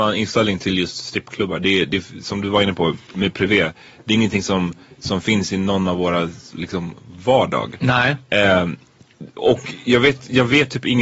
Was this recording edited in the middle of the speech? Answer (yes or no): no